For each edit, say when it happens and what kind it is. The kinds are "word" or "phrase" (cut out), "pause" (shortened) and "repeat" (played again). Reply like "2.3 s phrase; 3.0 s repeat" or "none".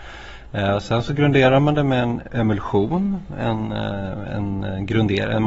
none